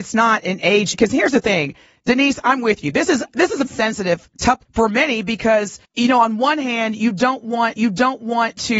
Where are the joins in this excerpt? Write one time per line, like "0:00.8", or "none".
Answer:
0:00.9
0:03.7
0:04.7
0:05.8
0:07.8

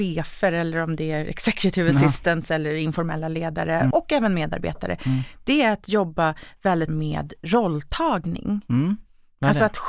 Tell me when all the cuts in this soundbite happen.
0:03.9
0:06.9

